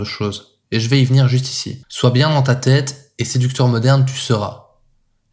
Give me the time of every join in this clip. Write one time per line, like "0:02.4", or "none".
0:01.8